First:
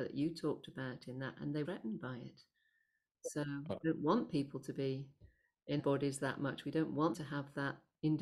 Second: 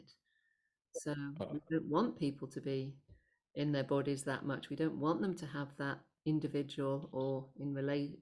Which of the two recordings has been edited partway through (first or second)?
first